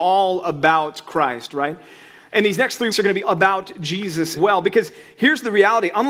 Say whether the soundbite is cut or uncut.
cut